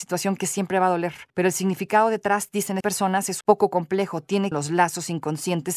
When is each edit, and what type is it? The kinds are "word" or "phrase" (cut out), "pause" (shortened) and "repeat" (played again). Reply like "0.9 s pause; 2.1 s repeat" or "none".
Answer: 1.3 s pause; 2.8 s word; 3.4 s word; 4.5 s phrase